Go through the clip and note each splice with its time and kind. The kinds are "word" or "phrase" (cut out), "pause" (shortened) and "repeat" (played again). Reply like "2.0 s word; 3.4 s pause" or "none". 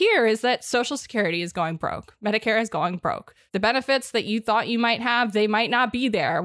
none